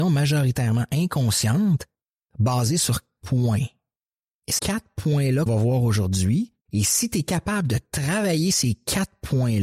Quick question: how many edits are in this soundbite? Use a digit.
4